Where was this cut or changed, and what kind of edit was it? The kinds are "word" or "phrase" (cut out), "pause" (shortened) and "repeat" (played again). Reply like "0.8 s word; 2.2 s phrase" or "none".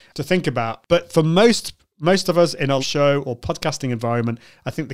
2.8 s word